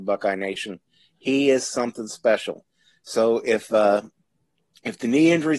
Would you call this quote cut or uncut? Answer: uncut